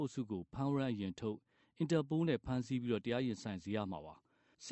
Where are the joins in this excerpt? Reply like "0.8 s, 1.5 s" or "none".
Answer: none